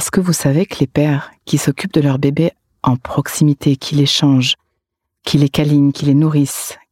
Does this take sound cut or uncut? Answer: uncut